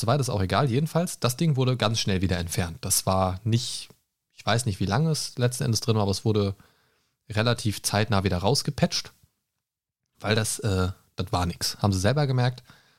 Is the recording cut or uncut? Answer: uncut